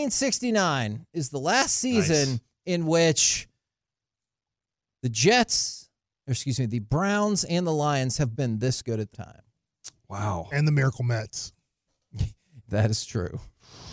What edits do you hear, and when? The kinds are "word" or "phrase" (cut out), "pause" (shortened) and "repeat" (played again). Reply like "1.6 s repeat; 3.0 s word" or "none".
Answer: 8.3 s word; 9.1 s word